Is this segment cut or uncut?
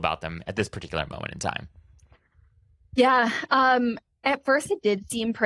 uncut